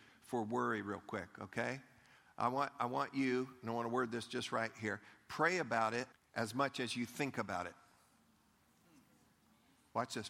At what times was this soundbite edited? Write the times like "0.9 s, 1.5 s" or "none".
6.1 s